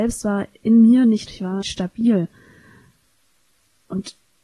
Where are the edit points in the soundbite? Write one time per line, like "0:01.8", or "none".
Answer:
0:01.3
0:01.6